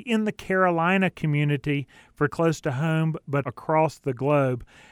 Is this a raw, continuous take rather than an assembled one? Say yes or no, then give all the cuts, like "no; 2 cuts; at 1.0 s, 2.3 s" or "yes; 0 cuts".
no; 2 cuts; at 2.3 s, 3.4 s